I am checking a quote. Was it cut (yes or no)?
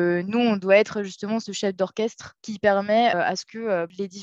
yes